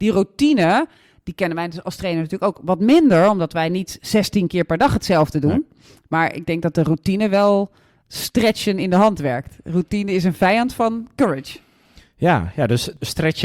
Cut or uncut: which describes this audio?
uncut